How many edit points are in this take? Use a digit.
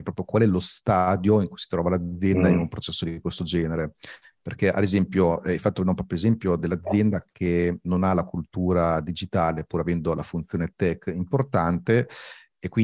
0